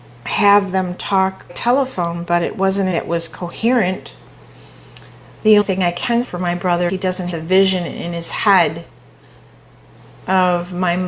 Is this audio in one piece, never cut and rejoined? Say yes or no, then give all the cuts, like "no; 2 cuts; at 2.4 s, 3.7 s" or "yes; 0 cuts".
no; 6 cuts; at 1.5 s, 2.9 s, 5.6 s, 6.2 s, 6.9 s, 7.3 s